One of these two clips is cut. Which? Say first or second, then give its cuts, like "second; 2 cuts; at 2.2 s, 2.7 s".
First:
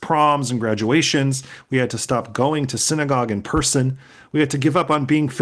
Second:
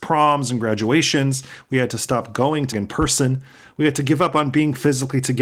second; 1 cut; at 2.7 s